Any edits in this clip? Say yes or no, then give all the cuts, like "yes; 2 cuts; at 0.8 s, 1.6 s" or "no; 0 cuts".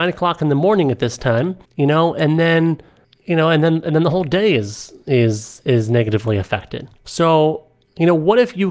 yes; 3 cuts; at 1.6 s, 3.0 s, 7.0 s